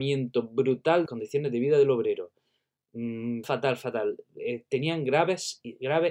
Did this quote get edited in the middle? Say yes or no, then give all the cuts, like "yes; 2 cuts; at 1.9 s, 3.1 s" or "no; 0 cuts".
yes; 2 cuts; at 1.1 s, 3.4 s